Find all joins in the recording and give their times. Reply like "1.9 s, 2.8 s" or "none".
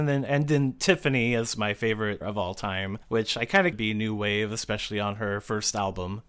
2.2 s, 3.0 s, 3.7 s